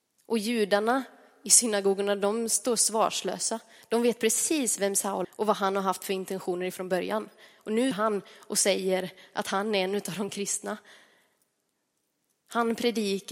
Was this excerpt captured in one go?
no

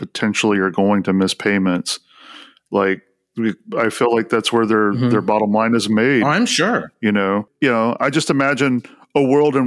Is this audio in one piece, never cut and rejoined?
yes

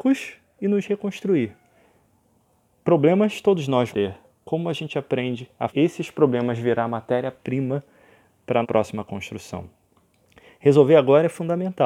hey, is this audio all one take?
no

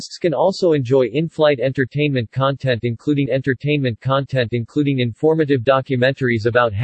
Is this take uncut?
no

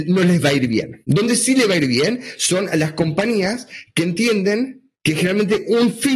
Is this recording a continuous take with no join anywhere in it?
no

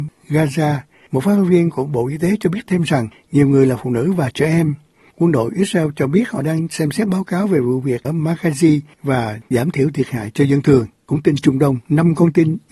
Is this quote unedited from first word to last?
no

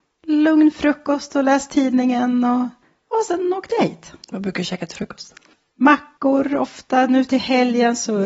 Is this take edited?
yes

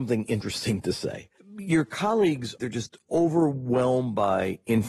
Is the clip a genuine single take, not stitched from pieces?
yes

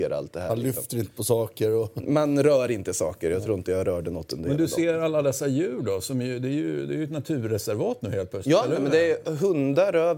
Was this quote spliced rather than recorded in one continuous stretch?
no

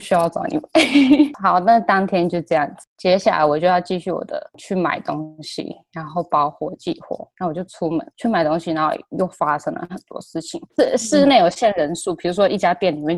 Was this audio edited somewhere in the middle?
no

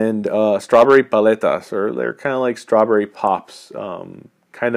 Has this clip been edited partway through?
no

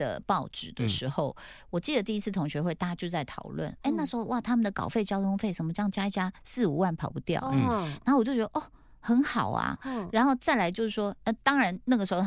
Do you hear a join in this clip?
no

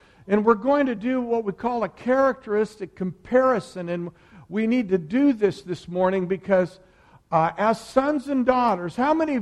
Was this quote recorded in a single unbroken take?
yes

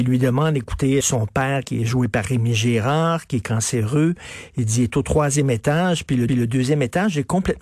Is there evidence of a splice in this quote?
yes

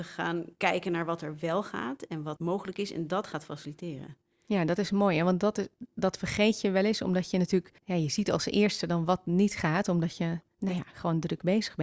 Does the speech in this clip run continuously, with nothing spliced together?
no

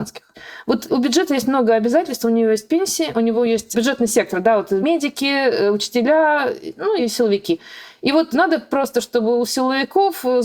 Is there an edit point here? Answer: no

